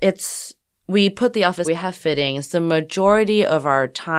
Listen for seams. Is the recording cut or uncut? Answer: cut